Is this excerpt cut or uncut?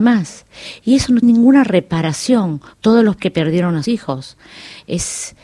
cut